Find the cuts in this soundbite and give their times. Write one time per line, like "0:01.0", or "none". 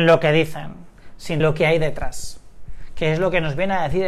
0:01.4